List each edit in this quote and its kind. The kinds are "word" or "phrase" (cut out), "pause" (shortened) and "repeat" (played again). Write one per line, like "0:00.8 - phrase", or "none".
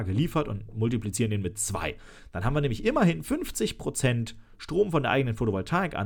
none